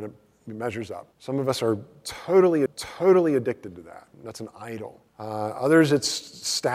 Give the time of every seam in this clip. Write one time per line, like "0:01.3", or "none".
0:01.1
0:02.7
0:04.1
0:05.1